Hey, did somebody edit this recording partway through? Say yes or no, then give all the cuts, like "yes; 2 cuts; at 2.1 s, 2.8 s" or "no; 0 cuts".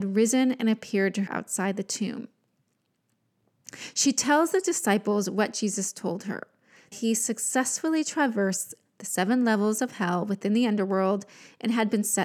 yes; 2 cuts; at 1.3 s, 6.9 s